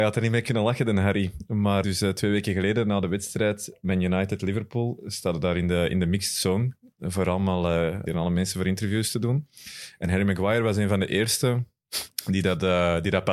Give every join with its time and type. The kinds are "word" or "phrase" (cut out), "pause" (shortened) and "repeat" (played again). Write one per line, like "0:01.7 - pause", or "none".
0:01.8 - word
0:08.1 - word